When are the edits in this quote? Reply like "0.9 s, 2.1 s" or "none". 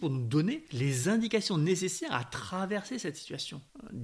none

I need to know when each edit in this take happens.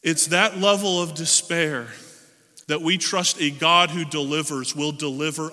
2.6 s

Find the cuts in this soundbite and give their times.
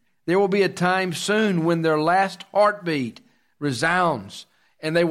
none

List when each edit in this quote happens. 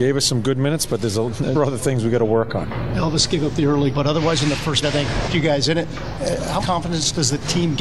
1.5 s, 3.9 s, 4.8 s, 5.3 s, 6.6 s

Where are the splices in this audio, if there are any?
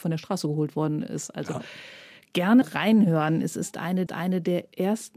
2.6 s, 4.1 s

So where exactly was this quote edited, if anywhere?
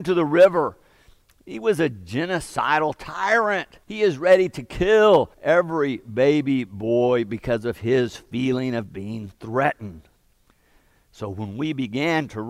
3.8 s, 5.3 s

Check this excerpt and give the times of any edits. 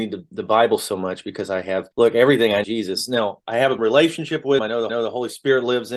1.9 s, 2.6 s, 3.8 s, 4.6 s, 4.9 s

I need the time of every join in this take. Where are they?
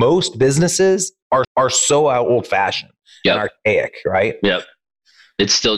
1.4 s

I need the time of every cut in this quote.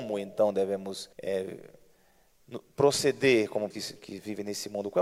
1.1 s, 3.7 s

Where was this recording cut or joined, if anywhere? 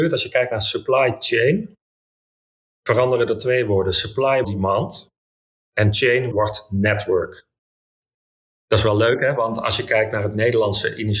4.4 s, 6.3 s

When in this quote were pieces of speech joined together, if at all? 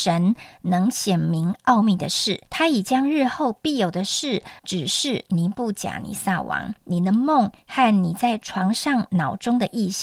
2.5 s, 4.6 s, 6.8 s

